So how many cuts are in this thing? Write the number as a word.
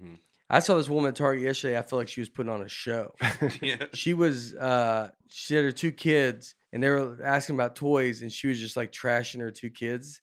two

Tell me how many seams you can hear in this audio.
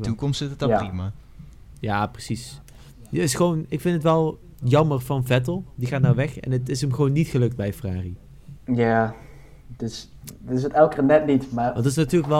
zero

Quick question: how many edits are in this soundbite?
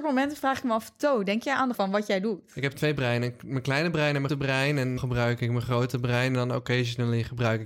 four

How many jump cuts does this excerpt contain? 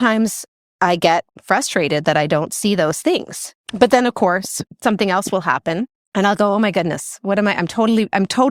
two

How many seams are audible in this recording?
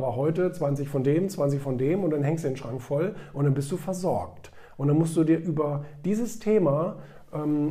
zero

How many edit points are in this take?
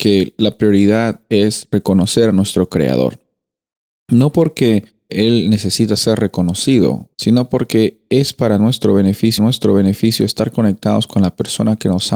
three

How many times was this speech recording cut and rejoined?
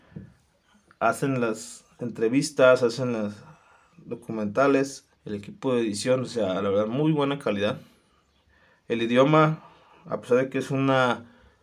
one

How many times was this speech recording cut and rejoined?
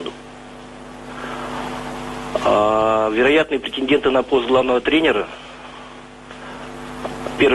zero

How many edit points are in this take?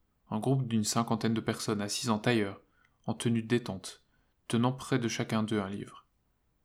zero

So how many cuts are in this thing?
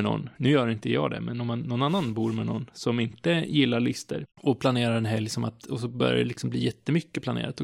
one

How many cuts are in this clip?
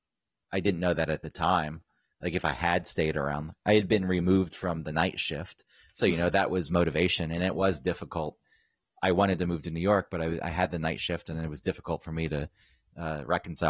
zero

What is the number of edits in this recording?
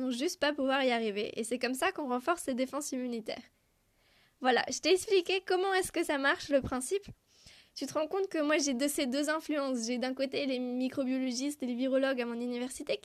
zero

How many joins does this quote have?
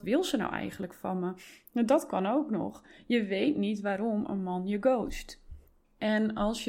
zero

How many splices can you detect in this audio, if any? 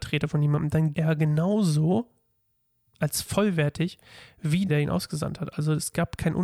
two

